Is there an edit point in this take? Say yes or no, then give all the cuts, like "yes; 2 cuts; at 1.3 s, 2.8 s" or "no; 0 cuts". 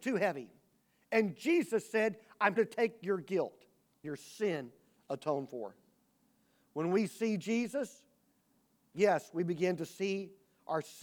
yes; 2 cuts; at 2.6 s, 4.0 s